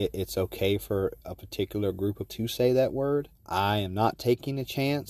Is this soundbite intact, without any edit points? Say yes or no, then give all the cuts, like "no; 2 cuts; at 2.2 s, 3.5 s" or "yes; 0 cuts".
no; 2 cuts; at 2.3 s, 3.4 s